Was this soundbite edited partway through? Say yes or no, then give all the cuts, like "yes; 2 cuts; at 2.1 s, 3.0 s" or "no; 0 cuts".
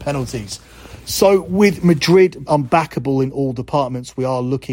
yes; 1 cut; at 2.5 s